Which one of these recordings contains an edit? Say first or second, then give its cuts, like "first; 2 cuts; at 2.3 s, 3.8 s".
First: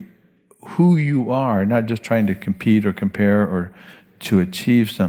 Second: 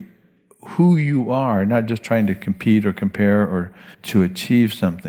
second; 1 cut; at 3.9 s